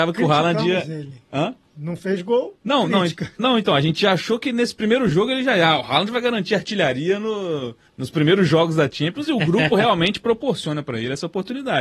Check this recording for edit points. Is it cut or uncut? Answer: cut